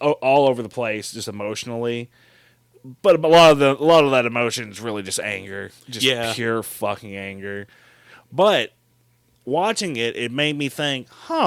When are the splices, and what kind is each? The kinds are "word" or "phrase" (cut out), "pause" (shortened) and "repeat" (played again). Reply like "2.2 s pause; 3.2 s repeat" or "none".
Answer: 3.0 s pause; 5.8 s pause